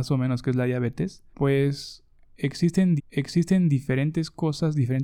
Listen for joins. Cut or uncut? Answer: cut